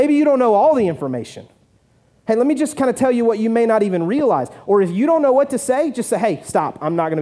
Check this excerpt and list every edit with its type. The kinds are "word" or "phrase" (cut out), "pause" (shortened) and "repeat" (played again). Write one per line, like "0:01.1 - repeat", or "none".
none